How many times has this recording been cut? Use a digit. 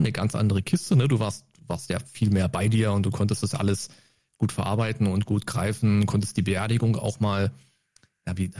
0